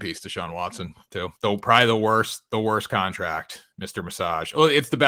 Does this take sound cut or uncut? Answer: cut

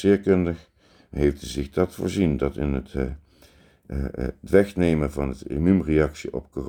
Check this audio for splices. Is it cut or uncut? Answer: uncut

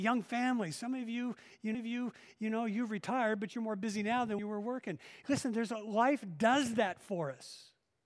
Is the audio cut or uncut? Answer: cut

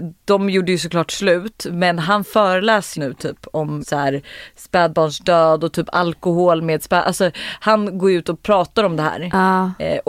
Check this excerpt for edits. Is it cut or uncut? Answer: cut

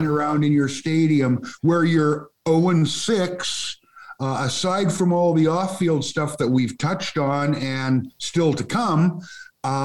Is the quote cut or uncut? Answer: uncut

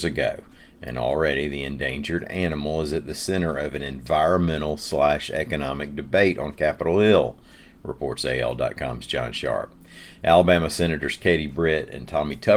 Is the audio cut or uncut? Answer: uncut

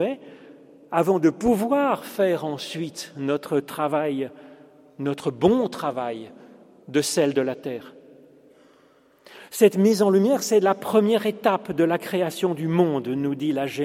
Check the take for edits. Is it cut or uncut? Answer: uncut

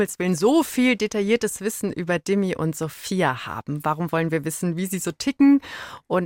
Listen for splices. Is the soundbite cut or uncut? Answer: uncut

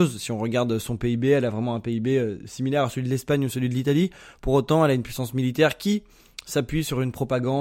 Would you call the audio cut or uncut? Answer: uncut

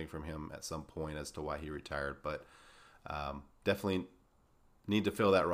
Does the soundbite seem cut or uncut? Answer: uncut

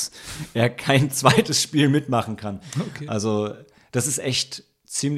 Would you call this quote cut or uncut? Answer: uncut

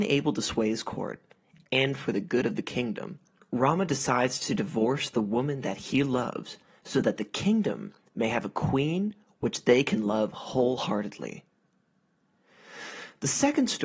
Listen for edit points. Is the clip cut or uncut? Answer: uncut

